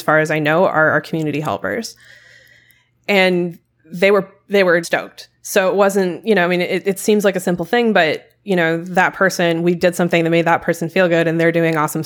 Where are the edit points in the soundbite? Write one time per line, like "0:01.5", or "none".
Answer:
0:04.8

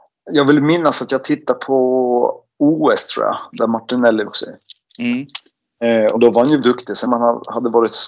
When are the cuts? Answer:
0:04.3
0:06.2
0:06.6
0:07.1

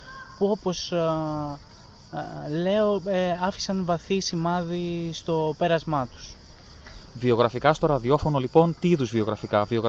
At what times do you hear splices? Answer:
none

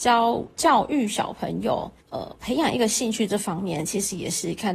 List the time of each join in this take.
0:02.0

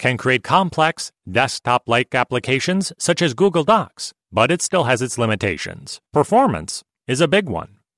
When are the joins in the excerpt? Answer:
0:04.2
0:06.1

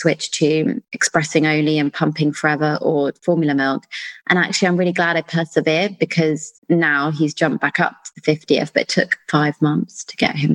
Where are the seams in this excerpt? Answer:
0:06.6

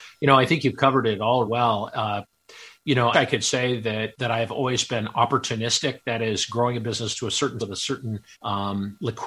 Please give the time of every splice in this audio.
0:01.5
0:03.1
0:04.2
0:07.6
0:08.3

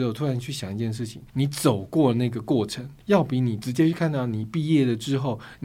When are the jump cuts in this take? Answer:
0:01.3
0:03.0

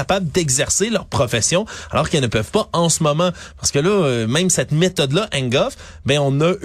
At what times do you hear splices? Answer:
none

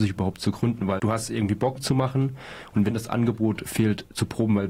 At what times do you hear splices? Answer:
0:01.0
0:01.8
0:02.9

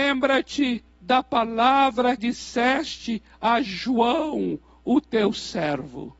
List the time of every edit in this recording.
0:02.2

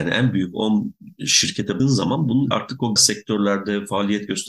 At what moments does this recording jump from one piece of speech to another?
0:01.8
0:02.5
0:03.0

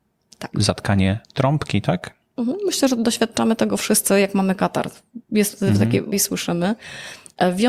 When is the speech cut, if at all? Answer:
0:01.2
0:06.1

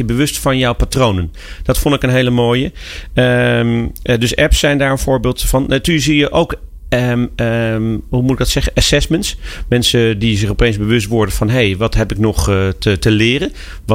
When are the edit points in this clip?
none

